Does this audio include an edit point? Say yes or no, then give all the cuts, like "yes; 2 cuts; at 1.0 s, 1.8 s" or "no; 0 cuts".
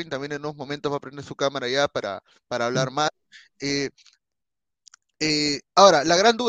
no; 0 cuts